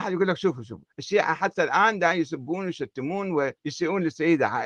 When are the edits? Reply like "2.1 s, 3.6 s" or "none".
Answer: 0.9 s, 3.6 s

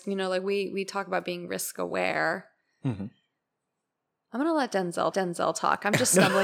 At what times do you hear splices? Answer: 5.1 s

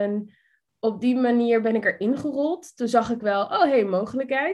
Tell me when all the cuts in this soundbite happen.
none

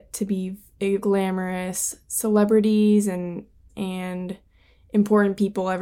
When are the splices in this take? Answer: 1.0 s, 3.7 s

